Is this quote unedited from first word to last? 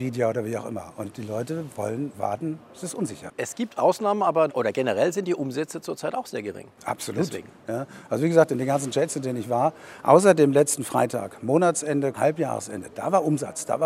no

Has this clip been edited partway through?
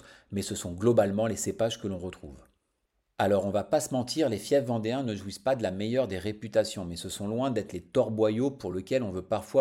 no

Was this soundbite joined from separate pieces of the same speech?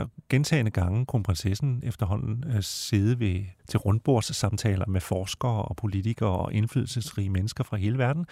yes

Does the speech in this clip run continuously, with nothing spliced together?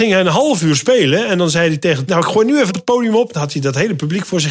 no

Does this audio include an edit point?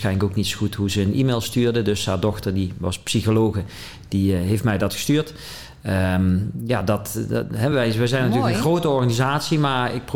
no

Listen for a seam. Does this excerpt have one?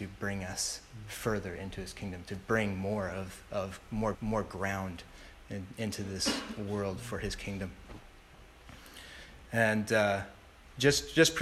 yes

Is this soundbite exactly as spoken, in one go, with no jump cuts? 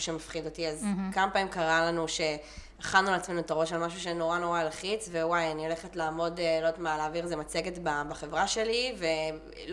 yes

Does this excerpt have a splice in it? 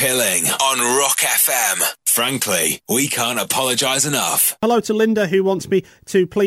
no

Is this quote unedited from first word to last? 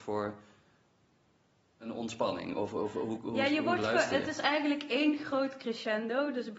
yes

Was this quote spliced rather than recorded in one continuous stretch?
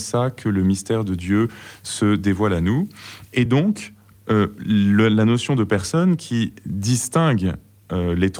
no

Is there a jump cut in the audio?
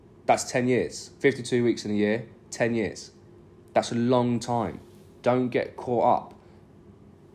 no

